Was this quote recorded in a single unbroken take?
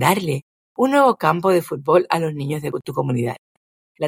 yes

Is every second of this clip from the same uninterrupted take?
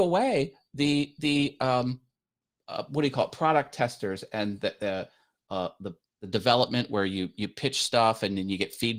yes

